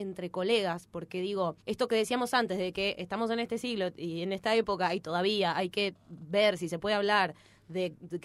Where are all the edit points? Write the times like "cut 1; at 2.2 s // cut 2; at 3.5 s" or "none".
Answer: cut 1; at 1.6 s // cut 2; at 6.0 s